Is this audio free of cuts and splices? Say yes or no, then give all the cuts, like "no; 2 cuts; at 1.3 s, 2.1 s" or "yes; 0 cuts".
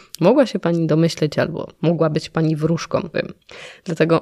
no; 1 cut; at 3.1 s